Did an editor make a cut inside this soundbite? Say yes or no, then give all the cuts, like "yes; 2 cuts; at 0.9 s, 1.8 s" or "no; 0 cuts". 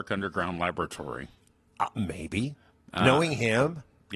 yes; 1 cut; at 1.4 s